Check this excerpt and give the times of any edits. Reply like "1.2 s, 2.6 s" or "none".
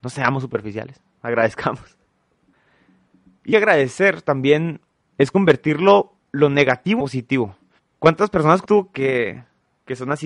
3.5 s, 4.9 s, 6.2 s, 7.0 s, 7.8 s, 8.6 s